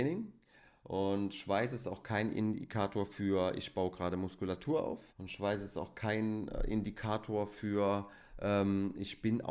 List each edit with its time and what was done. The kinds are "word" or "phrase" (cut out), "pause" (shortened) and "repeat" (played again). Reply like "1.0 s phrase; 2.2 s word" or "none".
5.1 s pause

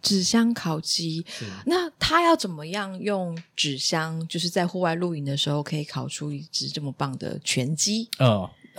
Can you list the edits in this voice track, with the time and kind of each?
none

